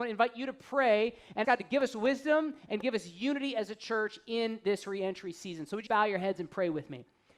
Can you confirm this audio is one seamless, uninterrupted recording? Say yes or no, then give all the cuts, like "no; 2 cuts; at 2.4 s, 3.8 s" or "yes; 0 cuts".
no; 2 cuts; at 1.4 s, 5.9 s